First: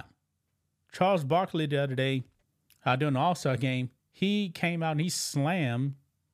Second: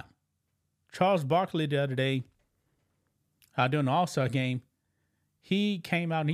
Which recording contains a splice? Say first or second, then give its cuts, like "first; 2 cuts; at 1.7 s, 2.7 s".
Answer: first; 2 cuts; at 2.4 s, 4.0 s